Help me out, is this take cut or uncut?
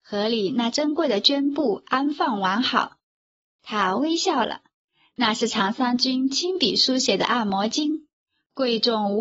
uncut